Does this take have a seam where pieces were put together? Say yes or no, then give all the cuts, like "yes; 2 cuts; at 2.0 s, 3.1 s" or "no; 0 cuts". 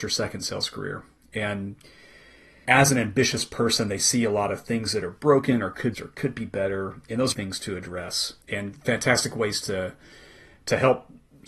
yes; 4 cuts; at 2.7 s, 5.9 s, 7.3 s, 8.4 s